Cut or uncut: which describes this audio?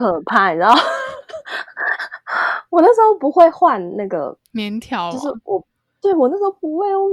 uncut